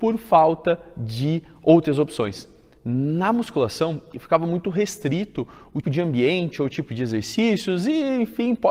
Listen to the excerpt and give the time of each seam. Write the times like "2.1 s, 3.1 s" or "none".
5.8 s

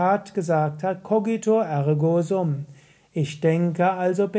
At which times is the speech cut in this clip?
none

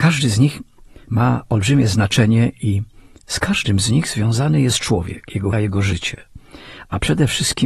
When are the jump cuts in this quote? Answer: 5.5 s

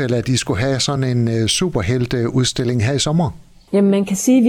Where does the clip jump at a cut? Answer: none

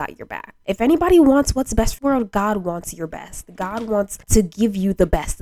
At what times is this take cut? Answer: 2.0 s, 4.2 s

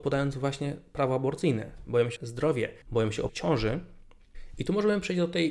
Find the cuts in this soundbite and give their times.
2.2 s, 2.8 s, 3.3 s

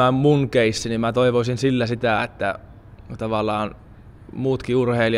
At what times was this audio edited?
none

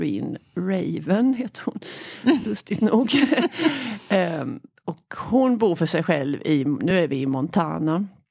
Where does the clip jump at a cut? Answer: none

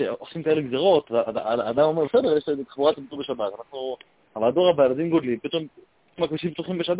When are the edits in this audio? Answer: none

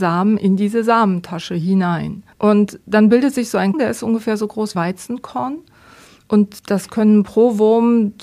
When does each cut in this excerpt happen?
2.3 s, 3.7 s, 4.7 s

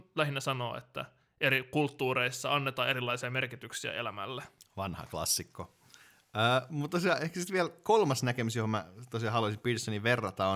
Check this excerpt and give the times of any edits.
none

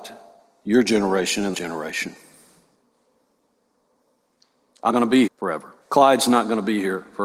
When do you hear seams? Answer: 1.5 s, 4.9 s, 5.3 s, 5.8 s

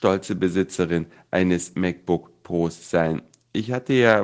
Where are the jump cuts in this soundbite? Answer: none

